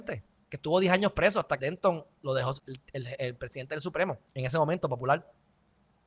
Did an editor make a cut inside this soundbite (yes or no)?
yes